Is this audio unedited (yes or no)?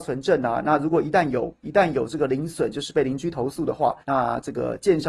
no